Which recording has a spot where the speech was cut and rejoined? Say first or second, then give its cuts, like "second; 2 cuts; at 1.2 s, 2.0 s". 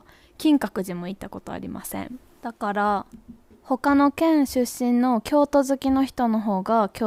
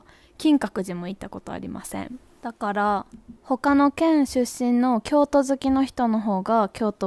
second; 1 cut; at 3.4 s